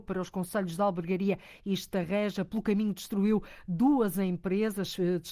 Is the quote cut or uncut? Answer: uncut